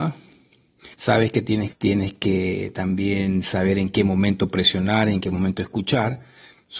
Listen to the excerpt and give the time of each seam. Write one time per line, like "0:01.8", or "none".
0:00.9
0:01.7